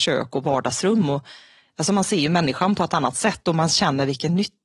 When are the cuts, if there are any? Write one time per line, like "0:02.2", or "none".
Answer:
none